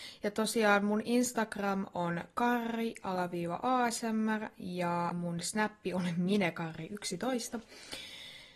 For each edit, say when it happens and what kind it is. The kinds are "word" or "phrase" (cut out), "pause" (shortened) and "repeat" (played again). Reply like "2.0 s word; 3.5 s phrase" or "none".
5.1 s word